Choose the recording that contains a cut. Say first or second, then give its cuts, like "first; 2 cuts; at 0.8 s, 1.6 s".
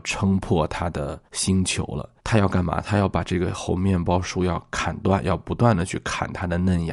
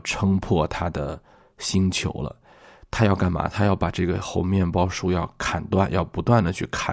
first; 2 cuts; at 1.3 s, 2.2 s